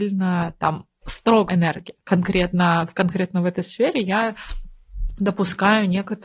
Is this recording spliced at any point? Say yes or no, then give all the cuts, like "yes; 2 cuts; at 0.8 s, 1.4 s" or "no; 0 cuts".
yes; 1 cut; at 1.5 s